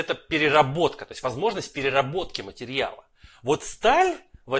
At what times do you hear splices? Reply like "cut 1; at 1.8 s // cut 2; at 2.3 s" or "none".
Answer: none

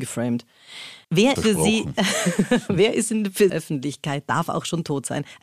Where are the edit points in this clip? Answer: cut 1; at 1.0 s // cut 2; at 1.4 s // cut 3; at 3.5 s

